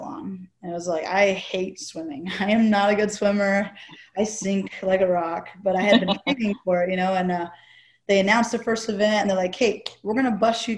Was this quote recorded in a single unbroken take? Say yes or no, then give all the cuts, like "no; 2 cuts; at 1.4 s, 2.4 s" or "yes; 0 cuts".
yes; 0 cuts